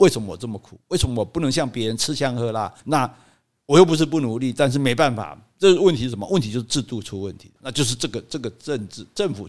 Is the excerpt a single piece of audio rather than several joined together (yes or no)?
no